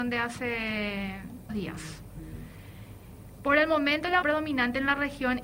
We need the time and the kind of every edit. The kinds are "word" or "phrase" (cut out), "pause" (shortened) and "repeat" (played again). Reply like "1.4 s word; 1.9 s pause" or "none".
1.5 s word; 4.2 s word

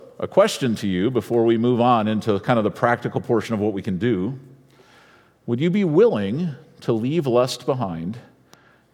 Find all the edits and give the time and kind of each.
none

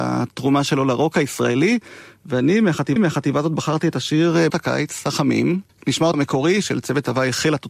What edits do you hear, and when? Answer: 3.0 s repeat; 4.5 s word; 5.7 s pause; 6.1 s word

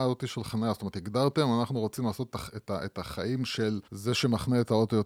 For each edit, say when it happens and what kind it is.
3.8 s pause

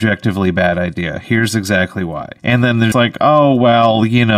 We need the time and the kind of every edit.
2.4 s pause; 2.9 s word

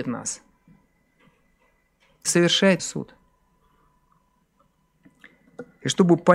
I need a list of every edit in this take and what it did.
2.3 s word; 2.8 s word

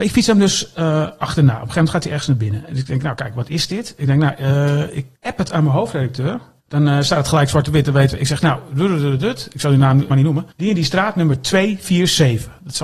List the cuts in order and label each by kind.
5.1 s pause; 6.6 s pause; 10.1 s phrase; 10.5 s pause

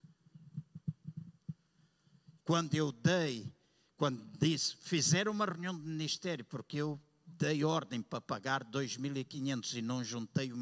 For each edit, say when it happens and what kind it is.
2.4 s phrase

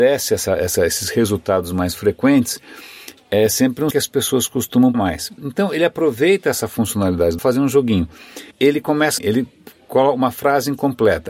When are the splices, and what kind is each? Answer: 3.9 s phrase; 4.9 s word; 7.4 s phrase; 8.5 s pause; 9.2 s word

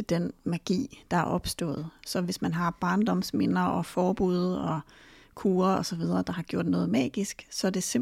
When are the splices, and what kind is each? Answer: none

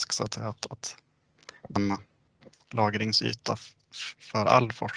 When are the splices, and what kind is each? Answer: 1.8 s word

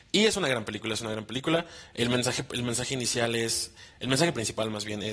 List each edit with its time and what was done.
none

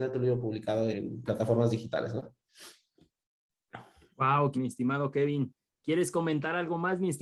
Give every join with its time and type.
0.9 s word; 1.3 s word; 4.5 s word

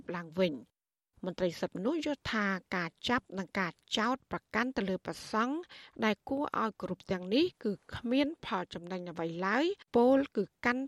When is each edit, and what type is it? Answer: 9.9 s pause

